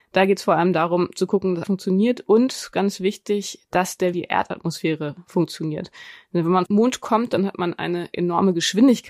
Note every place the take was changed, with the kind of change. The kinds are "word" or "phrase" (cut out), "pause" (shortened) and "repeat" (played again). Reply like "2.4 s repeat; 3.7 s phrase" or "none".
1.6 s word; 4.1 s phrase; 6.7 s word